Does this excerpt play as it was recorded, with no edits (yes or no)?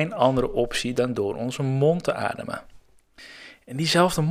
yes